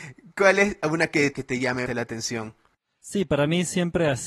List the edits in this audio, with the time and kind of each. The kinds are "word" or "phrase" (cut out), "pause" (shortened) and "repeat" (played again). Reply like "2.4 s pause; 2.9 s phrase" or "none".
1.3 s phrase; 1.9 s word